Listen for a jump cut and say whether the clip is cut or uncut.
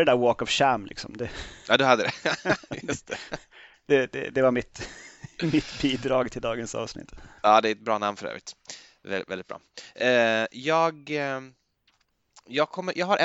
cut